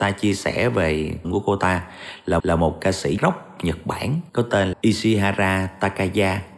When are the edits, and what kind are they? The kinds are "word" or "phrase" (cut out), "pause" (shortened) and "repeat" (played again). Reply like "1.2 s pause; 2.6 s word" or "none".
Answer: 1.2 s phrase; 2.4 s repeat; 3.2 s word; 4.3 s pause; 4.7 s word